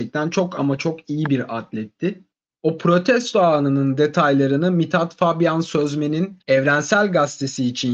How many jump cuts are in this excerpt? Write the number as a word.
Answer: two